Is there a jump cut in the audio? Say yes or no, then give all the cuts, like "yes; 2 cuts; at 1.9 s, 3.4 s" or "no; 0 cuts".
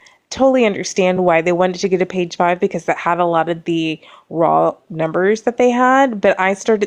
no; 0 cuts